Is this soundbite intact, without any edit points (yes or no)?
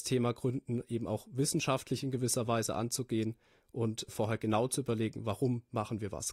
yes